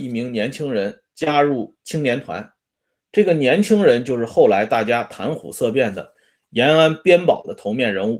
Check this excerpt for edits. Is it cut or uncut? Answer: cut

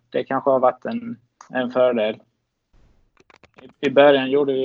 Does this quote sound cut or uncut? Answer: cut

